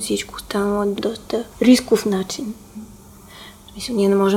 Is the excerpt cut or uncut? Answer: cut